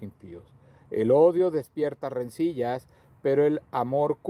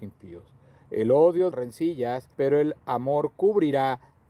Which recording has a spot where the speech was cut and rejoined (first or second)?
second